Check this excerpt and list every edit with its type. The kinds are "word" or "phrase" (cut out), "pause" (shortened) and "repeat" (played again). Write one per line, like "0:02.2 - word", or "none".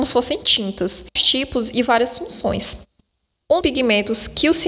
0:01.2 - phrase
0:03.6 - word